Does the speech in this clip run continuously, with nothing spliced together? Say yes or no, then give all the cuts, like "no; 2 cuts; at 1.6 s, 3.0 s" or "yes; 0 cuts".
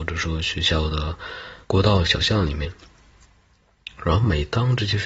no; 1 cut; at 1.6 s